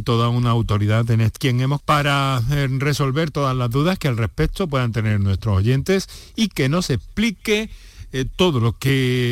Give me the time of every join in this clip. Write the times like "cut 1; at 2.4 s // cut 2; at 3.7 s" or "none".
cut 1; at 1.4 s // cut 2; at 1.8 s